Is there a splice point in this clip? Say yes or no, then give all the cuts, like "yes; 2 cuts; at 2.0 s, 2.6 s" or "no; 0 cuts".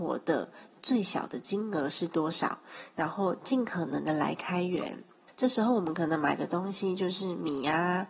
no; 0 cuts